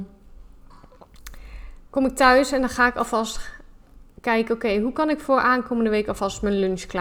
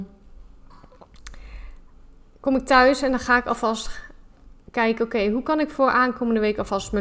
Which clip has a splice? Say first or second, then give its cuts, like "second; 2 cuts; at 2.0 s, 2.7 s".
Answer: first; 1 cut; at 1.9 s